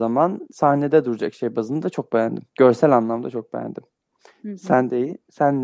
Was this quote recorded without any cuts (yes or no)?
no